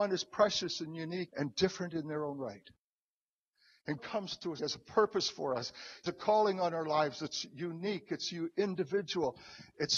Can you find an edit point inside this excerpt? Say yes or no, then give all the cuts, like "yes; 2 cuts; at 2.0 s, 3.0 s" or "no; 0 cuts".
yes; 4 cuts; at 1.3 s, 4.0 s, 4.6 s, 6.1 s